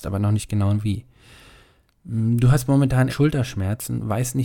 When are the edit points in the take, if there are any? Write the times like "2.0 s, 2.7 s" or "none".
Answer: 3.1 s